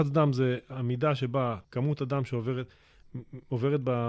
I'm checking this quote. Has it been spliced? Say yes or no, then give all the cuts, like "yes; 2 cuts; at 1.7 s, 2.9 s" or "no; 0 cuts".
yes; 1 cut; at 1.6 s